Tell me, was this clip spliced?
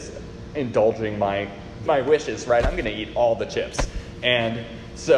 yes; 1 cut; at 1.9 s

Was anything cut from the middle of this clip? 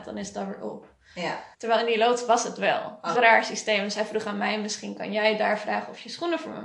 yes; 2 cuts; at 1.5 s, 3.1 s

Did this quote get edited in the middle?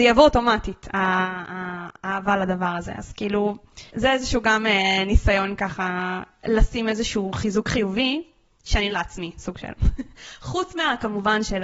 yes; 2 cuts; at 3.9 s, 8.9 s

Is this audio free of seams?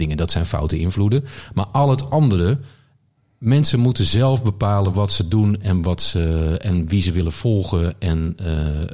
yes; 0 cuts

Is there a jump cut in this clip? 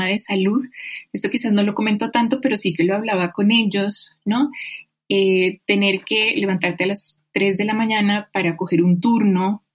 no; 0 cuts

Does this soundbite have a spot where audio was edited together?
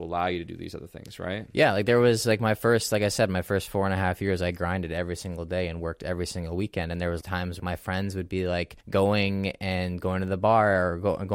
yes; 3 cuts; at 7.2 s, 7.6 s, 8.8 s

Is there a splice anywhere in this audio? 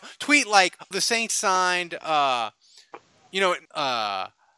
yes; 3 cuts; at 0.9 s, 1.3 s, 3.6 s

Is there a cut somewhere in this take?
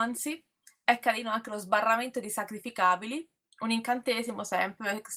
no; 0 cuts

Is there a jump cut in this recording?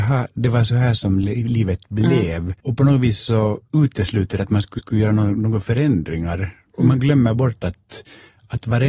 yes; 2 cuts; at 2.6 s, 4.8 s

